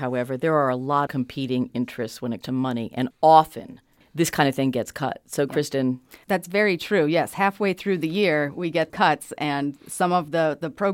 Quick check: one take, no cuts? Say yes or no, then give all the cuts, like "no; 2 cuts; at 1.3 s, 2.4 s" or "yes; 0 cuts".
no; 5 cuts; at 1.1 s, 2.4 s, 3.1 s, 6.2 s, 8.9 s